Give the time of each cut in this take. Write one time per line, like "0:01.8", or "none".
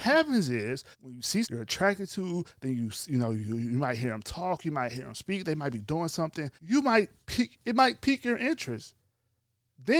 0:00.9
0:01.4
0:06.6